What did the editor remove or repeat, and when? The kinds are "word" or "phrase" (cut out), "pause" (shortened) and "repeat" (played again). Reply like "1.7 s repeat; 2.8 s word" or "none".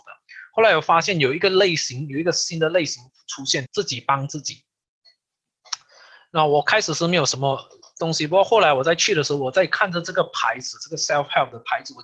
3.7 s phrase